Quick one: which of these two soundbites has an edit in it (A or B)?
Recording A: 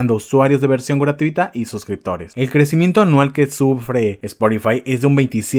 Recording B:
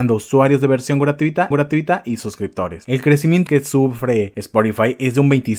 B